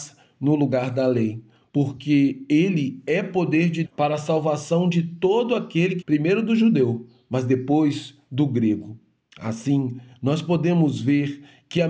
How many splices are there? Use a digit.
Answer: 2